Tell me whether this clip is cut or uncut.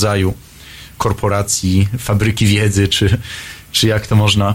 uncut